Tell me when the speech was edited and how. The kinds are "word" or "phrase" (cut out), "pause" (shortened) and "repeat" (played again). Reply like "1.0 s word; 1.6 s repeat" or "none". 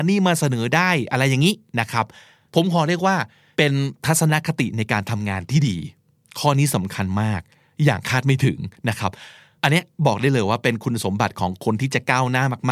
none